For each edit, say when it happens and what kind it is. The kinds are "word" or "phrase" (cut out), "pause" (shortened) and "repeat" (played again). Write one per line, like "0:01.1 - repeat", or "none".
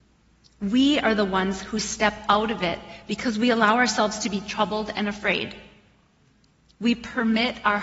none